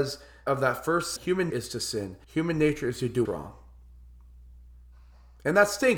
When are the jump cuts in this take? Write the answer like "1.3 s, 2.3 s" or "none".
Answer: 1.2 s, 1.5 s, 2.2 s, 3.2 s